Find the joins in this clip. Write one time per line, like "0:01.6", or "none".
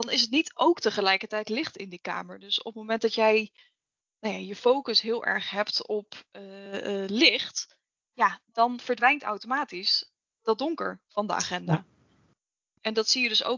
none